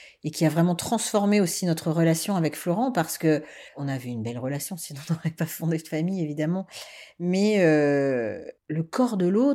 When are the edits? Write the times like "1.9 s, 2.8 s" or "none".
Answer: 3.7 s, 8.6 s